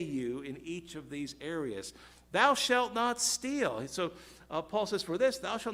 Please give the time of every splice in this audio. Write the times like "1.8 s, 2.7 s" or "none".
none